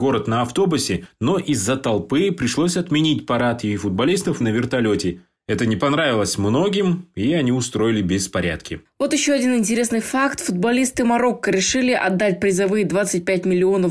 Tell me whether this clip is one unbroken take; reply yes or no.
no